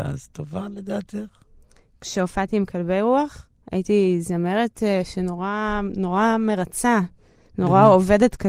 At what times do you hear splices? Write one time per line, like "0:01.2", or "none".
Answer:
none